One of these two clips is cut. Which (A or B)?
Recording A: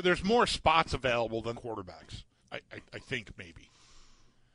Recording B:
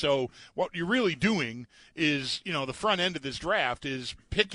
A